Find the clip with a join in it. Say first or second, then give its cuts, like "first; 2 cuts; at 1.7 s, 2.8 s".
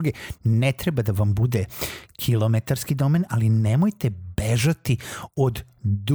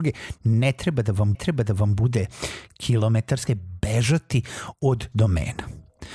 second; 3 cuts; at 1.3 s, 3.5 s, 5.1 s